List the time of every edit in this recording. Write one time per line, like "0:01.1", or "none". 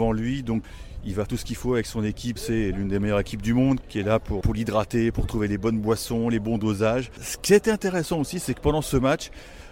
0:01.3
0:02.4
0:03.8
0:04.4